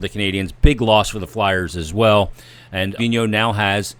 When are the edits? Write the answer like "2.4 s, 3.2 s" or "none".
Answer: 3.0 s